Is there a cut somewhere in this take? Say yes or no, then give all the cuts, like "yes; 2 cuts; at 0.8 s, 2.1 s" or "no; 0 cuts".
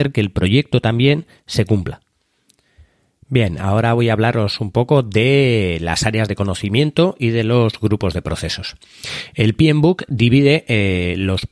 no; 0 cuts